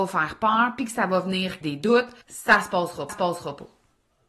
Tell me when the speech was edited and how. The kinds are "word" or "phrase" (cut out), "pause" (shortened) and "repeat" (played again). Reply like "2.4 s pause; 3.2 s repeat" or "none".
1.6 s word; 2.2 s pause; 3.1 s repeat